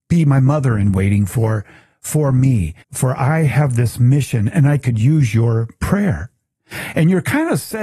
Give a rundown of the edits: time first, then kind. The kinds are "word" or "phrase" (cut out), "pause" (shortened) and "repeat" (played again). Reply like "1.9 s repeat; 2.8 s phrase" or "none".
2.8 s pause